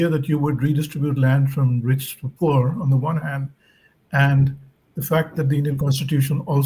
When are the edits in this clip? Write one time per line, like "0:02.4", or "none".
0:04.7